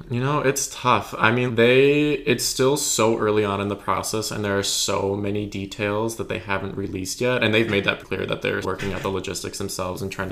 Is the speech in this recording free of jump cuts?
no; 3 cuts; at 1.5 s, 8.0 s, 8.6 s

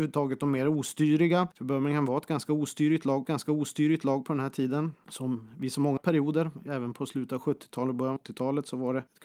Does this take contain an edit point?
yes; 3 cuts; at 3.2 s, 6.0 s, 8.2 s

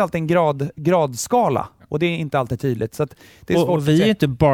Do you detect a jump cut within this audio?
no; 0 cuts

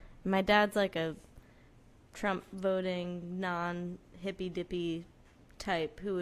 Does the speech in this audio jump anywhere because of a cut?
no; 0 cuts

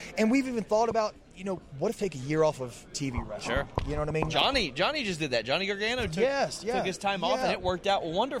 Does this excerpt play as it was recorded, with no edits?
no; 1 cut; at 2.0 s

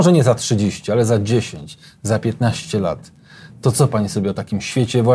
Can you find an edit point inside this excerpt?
no; 0 cuts

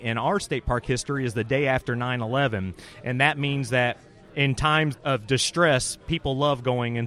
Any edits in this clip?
yes; 1 cut; at 4.9 s

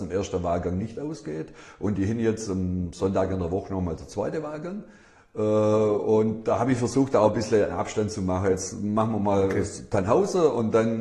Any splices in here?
no; 0 cuts

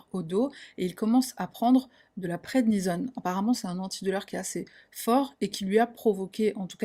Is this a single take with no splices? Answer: no; 1 cut; at 3.6 s

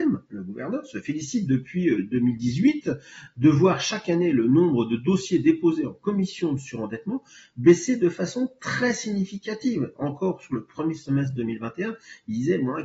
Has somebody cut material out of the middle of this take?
no; 0 cuts

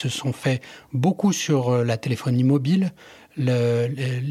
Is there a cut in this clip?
no; 0 cuts

